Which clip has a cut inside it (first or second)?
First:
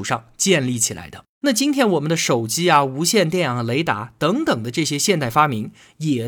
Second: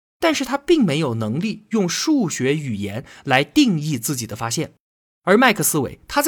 first